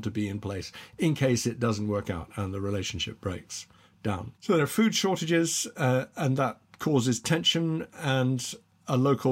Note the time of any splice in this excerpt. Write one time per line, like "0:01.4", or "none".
0:04.3